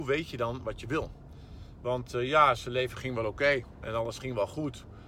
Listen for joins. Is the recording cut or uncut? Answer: uncut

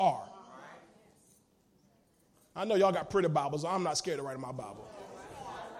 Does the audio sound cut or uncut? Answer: uncut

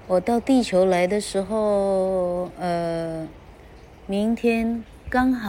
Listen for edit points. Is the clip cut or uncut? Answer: uncut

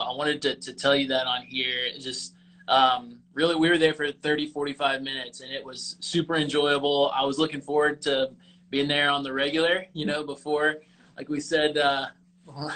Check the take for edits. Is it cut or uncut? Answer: uncut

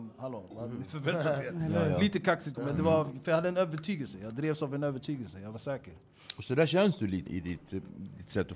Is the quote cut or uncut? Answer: cut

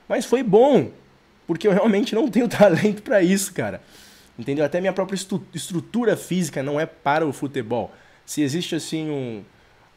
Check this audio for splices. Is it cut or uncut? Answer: uncut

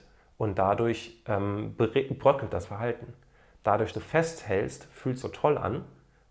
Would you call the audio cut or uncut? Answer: cut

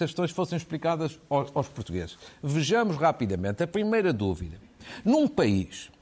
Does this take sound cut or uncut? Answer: uncut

